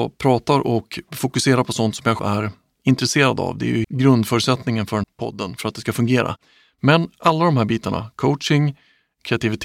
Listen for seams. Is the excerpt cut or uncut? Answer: cut